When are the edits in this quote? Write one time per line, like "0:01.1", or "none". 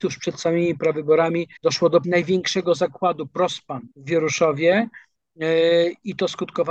0:01.6
0:02.0
0:03.9

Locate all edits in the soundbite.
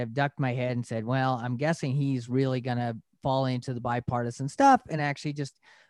none

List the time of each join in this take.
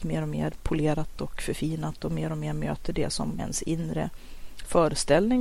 0:03.4

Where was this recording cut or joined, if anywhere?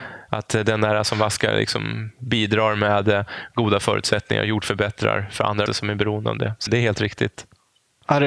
0:05.7
0:06.7

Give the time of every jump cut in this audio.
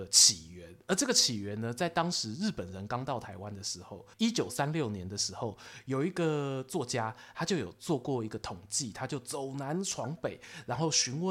0:04.1

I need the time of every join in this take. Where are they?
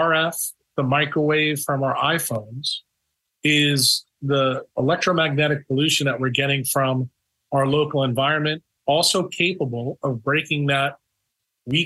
none

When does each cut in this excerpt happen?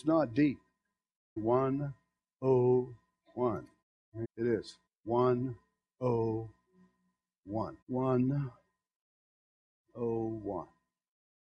0:01.4
0:03.8
0:04.2
0:04.9
0:07.8

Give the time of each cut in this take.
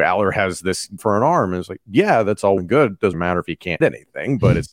0:01.0
0:02.6
0:03.1
0:03.8

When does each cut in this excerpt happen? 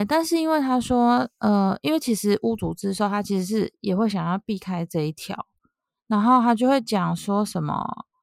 none

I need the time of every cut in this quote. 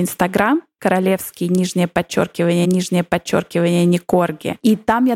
0:02.6

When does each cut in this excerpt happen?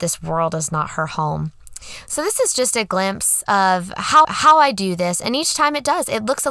0:04.2

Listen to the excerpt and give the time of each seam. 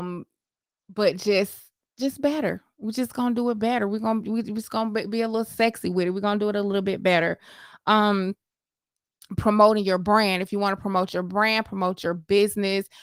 none

